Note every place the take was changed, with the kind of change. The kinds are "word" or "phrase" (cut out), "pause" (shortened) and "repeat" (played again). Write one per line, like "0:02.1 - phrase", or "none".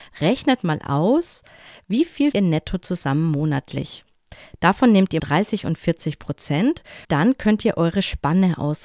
0:02.3 - word
0:05.2 - word
0:07.0 - word